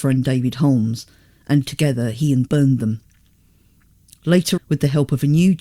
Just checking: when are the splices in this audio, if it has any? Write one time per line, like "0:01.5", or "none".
0:02.5
0:04.6